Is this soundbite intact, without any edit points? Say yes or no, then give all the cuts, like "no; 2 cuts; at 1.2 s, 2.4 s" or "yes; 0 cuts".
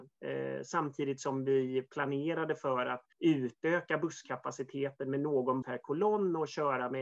no; 2 cuts; at 3.1 s, 5.6 s